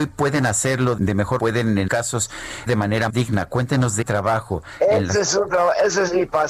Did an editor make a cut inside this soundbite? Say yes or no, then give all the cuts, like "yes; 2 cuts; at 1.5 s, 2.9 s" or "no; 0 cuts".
yes; 6 cuts; at 1.0 s, 1.4 s, 1.9 s, 2.7 s, 3.1 s, 4.0 s